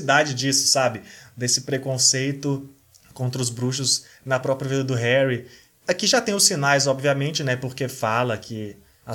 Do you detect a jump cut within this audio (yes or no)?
no